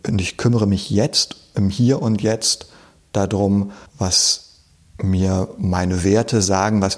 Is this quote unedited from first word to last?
no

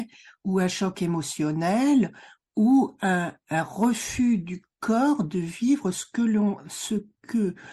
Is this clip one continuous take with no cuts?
yes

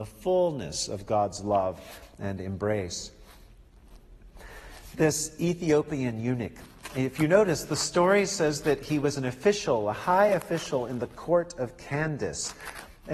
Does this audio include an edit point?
no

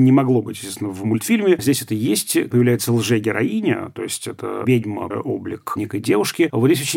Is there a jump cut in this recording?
yes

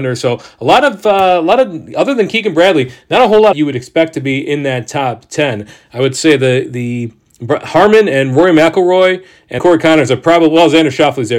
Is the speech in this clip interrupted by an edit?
yes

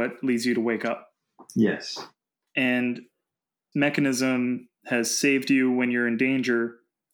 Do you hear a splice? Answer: yes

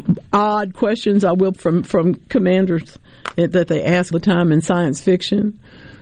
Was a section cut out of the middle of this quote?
yes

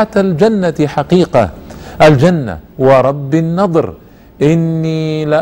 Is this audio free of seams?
no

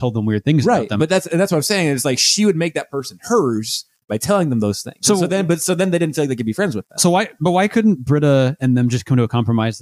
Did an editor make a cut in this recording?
no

